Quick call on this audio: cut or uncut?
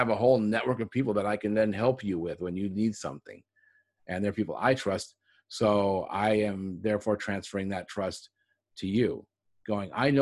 uncut